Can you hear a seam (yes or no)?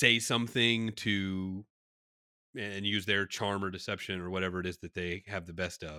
no